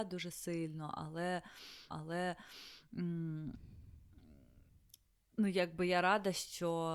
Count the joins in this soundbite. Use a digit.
1